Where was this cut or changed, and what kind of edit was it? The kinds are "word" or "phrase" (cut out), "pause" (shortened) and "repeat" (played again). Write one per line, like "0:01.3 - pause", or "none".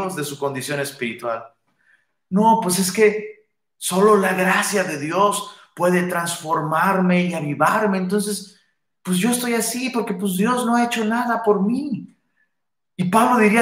none

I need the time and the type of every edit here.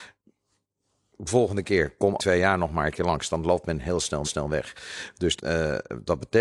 0:02.2 - word
0:04.2 - repeat
0:05.4 - word

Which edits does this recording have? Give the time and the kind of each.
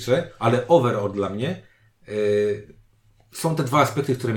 none

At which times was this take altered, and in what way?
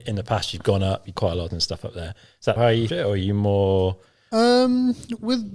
0:01.2 - word
0:01.5 - word
0:02.6 - word
0:02.9 - phrase

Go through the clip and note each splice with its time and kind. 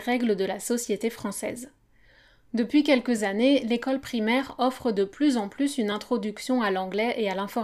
none

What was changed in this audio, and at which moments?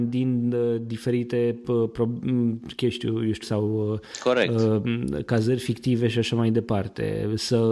0:03.4 - word

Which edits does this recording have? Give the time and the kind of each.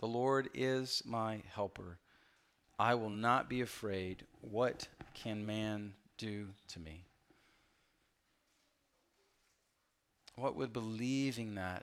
none

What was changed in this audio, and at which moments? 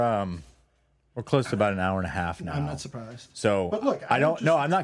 none

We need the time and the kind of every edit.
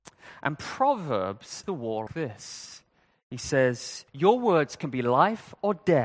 0:01.6 - word
0:02.1 - word
0:04.1 - pause

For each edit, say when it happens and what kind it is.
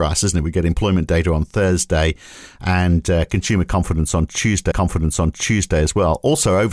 0:04.7 - repeat

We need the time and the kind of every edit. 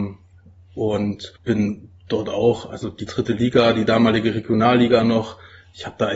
0:01.4 - pause
0:03.1 - word

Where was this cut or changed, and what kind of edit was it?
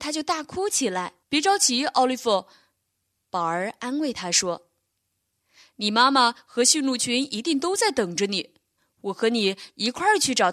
0:01.2 - pause

